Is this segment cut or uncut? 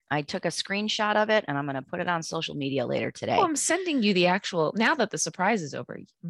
uncut